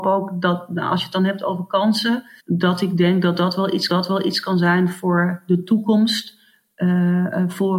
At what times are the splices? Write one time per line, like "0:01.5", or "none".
0:02.4
0:03.9